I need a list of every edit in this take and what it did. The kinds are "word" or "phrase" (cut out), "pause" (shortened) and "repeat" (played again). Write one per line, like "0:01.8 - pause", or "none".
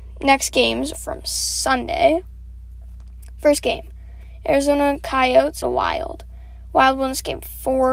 0:00.9 - word
0:05.6 - phrase